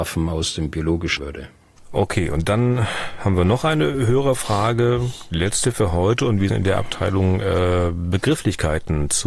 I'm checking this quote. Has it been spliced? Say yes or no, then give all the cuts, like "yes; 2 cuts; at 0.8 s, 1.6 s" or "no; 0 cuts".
yes; 2 cuts; at 1.2 s, 6.5 s